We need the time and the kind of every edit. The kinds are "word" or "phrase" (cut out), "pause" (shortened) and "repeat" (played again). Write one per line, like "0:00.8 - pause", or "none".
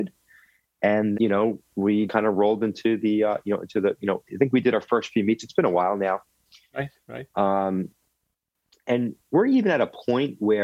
0:01.1 - word
0:02.1 - word